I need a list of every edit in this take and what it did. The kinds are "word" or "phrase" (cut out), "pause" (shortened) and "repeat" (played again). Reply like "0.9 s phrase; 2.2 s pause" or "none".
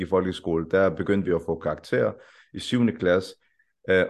none